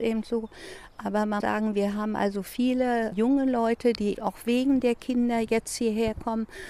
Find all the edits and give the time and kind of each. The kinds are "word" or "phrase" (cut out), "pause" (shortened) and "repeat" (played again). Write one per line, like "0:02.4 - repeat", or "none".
0:01.4 - word
0:03.1 - word
0:04.1 - word